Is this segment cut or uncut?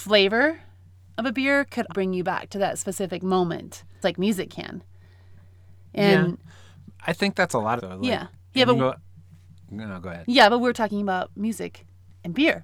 cut